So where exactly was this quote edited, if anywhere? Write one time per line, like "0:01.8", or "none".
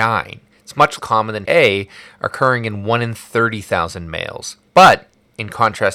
0:01.0
0:01.4
0:04.7